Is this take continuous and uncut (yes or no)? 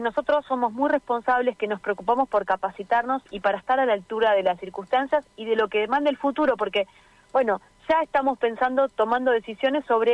yes